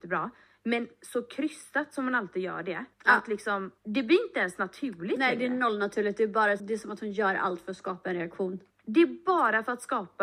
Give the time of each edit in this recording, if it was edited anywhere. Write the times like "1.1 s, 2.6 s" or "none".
2.9 s, 3.8 s, 6.6 s, 8.7 s